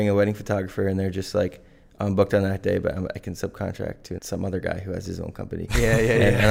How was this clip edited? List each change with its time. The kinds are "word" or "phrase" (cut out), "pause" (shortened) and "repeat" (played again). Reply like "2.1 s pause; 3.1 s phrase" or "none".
4.2 s word